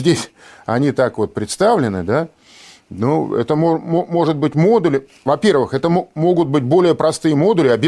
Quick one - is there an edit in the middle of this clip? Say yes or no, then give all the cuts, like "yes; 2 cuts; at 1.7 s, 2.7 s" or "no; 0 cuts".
no; 0 cuts